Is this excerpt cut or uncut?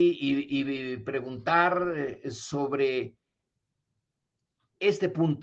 uncut